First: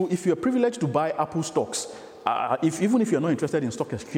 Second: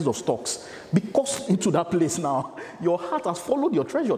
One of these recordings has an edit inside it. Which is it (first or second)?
second